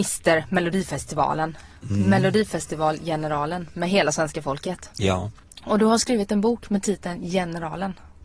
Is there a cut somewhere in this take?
no; 0 cuts

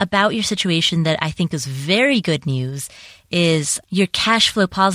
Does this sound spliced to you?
no; 0 cuts

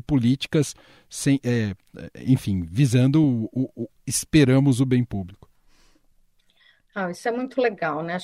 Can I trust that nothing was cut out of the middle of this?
yes; 0 cuts

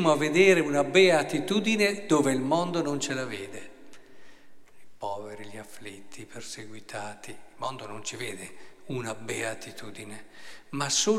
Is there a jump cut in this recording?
no; 0 cuts

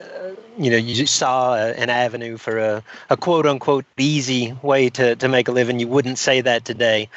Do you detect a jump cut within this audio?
yes; 1 cut; at 1.1 s

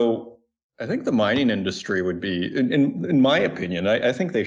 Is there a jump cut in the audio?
no; 0 cuts

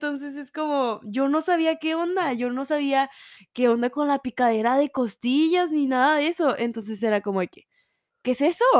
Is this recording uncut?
yes; 0 cuts

